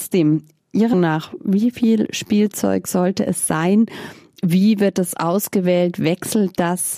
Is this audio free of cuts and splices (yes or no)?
no